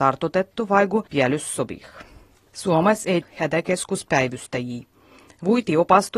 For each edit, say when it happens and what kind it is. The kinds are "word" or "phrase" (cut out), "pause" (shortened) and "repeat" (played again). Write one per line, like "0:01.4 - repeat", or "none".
0:01.1 - pause
0:02.4 - pause
0:03.2 - phrase